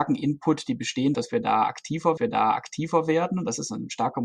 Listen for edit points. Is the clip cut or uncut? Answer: cut